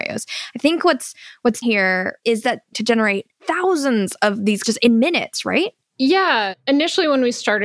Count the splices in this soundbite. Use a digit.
4